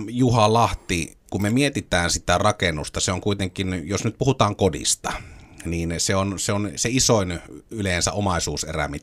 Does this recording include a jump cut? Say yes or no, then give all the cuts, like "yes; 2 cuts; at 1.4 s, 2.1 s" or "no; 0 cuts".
yes; 1 cut; at 1.2 s